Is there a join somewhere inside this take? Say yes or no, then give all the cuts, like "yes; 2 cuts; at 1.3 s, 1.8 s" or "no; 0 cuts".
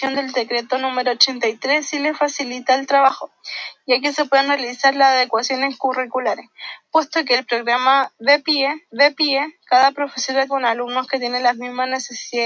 yes; 2 cuts; at 8.9 s, 10.5 s